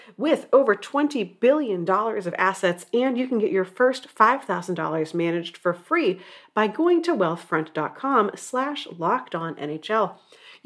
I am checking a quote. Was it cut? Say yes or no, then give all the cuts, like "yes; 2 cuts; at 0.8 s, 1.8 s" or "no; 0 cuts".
no; 0 cuts